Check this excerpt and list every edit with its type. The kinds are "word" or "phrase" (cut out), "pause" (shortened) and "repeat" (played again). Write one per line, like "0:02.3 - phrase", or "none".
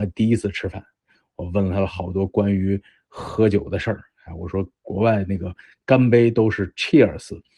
none